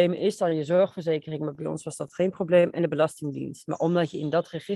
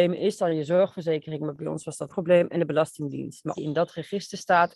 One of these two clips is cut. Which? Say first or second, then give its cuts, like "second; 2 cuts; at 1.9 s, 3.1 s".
second; 2 cuts; at 2.1 s, 3.5 s